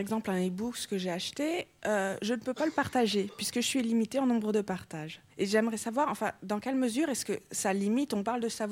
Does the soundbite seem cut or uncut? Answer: cut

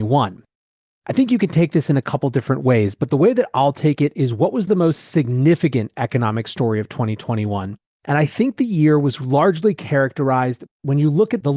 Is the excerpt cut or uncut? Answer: uncut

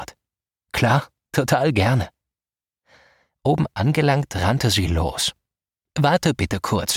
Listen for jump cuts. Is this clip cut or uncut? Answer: uncut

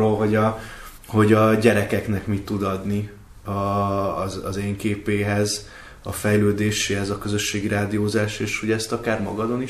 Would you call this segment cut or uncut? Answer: cut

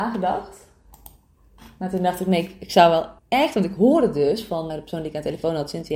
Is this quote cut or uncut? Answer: cut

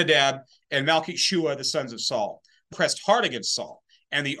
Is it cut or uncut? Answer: cut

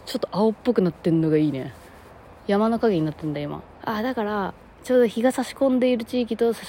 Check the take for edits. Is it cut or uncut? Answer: cut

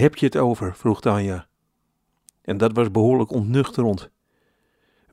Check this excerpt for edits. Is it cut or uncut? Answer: uncut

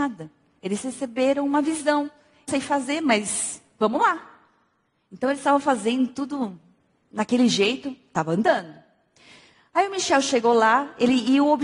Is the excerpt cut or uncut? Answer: cut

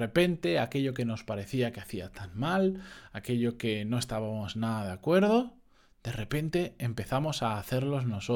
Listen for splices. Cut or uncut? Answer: uncut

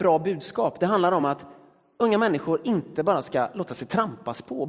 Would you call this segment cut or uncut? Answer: uncut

